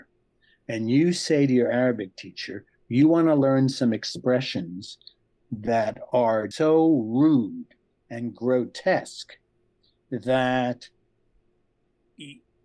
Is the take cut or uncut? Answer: cut